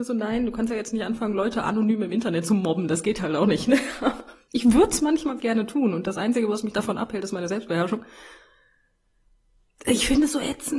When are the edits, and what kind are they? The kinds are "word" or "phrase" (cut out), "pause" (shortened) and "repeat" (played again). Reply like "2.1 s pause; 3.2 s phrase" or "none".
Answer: 5.4 s word